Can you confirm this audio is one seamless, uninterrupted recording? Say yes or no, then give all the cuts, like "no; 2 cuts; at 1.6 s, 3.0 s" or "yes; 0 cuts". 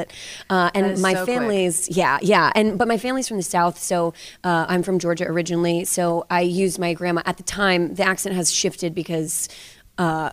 yes; 0 cuts